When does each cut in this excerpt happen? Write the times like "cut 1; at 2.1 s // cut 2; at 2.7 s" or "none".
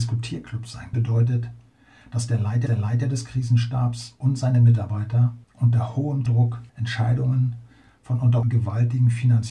cut 1; at 0.9 s // cut 2; at 2.7 s // cut 3; at 5.4 s // cut 4; at 6.3 s // cut 5; at 6.7 s // cut 6; at 8.4 s